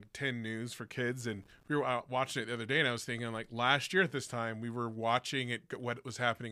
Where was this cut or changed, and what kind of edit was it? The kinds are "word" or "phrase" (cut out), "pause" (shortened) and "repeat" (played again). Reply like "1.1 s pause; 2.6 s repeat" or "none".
1.5 s pause